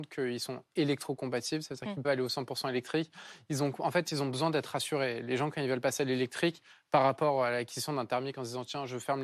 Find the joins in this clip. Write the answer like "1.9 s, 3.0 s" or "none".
2.0 s

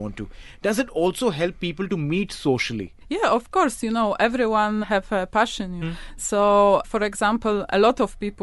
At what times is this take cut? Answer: 3.0 s, 4.8 s, 5.8 s, 6.8 s

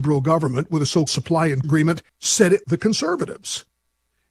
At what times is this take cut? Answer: 1.1 s, 1.6 s, 2.1 s, 2.6 s

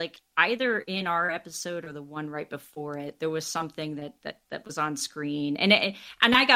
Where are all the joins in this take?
none

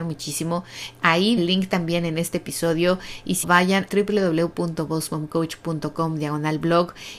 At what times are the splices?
1.4 s, 3.4 s, 3.9 s

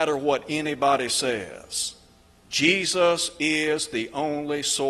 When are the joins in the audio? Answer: none

